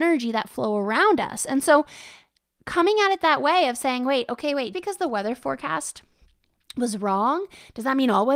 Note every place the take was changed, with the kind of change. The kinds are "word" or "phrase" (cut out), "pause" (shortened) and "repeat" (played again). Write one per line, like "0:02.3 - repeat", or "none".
0:04.7 - word